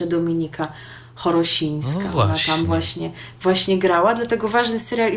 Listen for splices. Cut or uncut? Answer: uncut